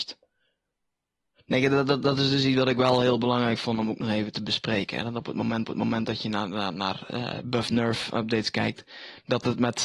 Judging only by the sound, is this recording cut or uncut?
cut